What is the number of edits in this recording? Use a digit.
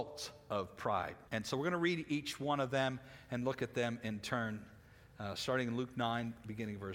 1